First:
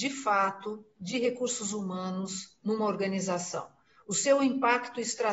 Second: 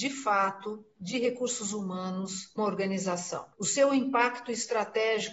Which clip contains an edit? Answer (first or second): second